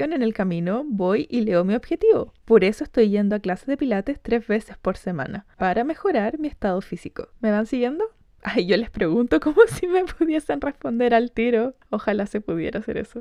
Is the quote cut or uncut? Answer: uncut